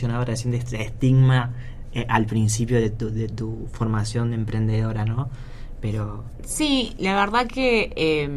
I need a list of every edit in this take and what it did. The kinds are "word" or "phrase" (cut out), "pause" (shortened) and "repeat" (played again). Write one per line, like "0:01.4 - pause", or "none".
none

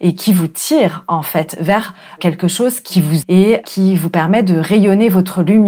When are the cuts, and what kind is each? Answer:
0:03.2 - word

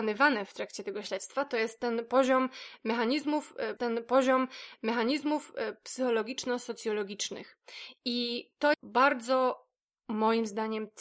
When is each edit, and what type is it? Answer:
0:03.8 - repeat
0:08.7 - word

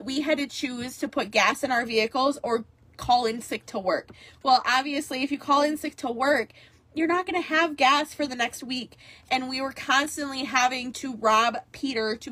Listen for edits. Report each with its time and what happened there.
none

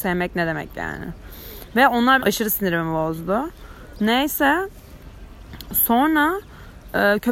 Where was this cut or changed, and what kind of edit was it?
0:02.2 - word

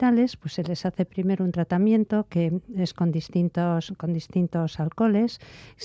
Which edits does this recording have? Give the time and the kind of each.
none

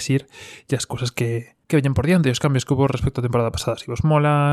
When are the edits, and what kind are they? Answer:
0:01.6 - pause

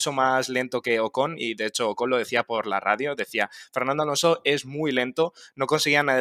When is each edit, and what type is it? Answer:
none

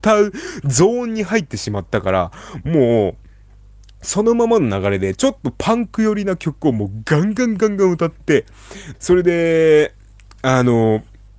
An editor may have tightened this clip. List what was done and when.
0:08.9 - word

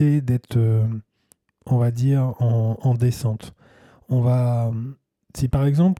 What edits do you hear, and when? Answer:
none

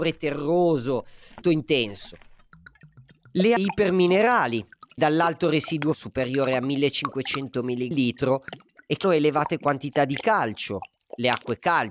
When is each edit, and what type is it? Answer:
0:01.4 - word
0:03.6 - word
0:05.0 - word
0:05.9 - word
0:07.9 - word
0:09.0 - word

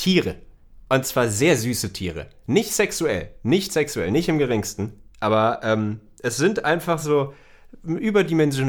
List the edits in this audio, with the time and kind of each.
none

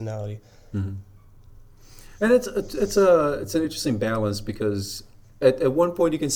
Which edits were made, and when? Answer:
none

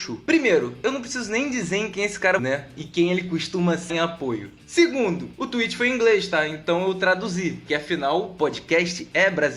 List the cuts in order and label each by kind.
0:02.4 - word
0:03.9 - word
0:07.7 - word

